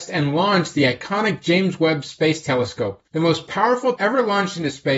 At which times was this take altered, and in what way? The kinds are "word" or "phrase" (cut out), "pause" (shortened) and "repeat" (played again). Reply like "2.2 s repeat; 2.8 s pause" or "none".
3.1 s pause; 4.0 s word